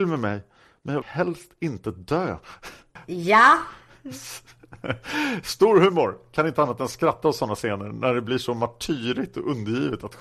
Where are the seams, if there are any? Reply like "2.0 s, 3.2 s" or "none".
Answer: 1.0 s